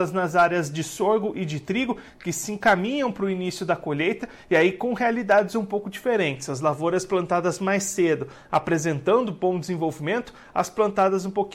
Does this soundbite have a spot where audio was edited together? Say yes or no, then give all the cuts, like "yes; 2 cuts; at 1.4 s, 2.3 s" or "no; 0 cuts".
no; 0 cuts